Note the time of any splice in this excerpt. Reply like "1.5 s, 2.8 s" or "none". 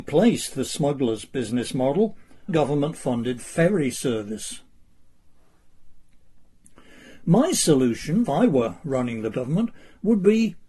2.5 s, 8.3 s, 9.3 s